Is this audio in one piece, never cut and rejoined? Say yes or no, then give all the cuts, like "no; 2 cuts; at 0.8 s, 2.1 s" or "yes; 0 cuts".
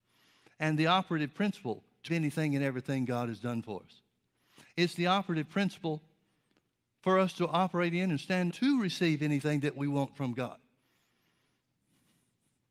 no; 2 cuts; at 2.1 s, 8.5 s